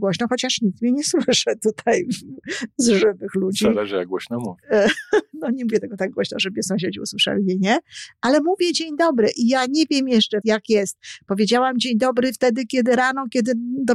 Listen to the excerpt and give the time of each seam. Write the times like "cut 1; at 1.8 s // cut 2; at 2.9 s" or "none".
cut 1; at 10.4 s

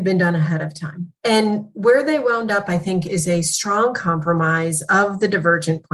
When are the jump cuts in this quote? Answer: cut 1; at 1.2 s

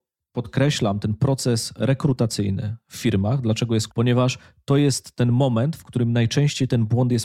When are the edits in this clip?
cut 1; at 3.9 s

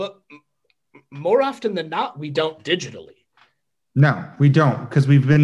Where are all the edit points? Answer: none

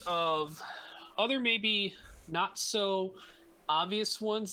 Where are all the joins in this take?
none

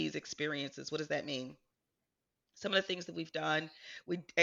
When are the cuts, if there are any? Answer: none

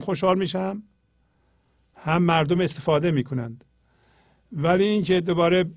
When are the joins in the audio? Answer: none

